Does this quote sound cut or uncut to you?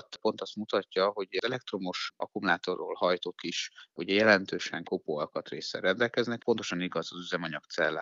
cut